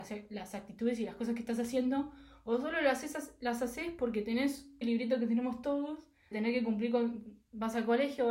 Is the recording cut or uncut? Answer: cut